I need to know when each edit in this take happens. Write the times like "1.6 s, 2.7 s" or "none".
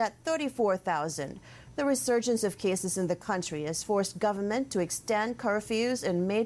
none